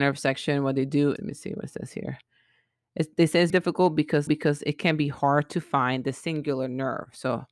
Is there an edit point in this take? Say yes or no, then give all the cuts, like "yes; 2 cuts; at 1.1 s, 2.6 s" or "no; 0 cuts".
yes; 3 cuts; at 1.2 s, 3.5 s, 4.3 s